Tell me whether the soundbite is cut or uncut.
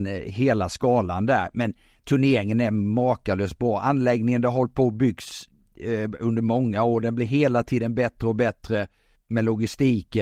cut